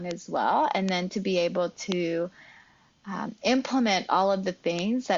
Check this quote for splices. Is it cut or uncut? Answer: uncut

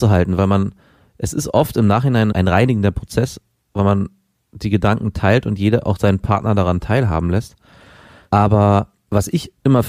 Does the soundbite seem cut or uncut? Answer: uncut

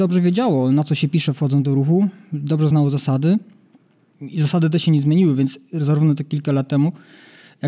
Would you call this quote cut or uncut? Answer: uncut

